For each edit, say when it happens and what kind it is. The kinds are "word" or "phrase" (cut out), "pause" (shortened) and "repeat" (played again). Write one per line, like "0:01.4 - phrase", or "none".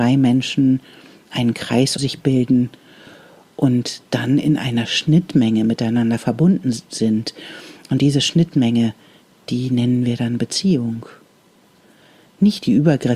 0:02.0 - word